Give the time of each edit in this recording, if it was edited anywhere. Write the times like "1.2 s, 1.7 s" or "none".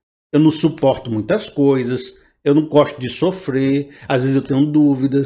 none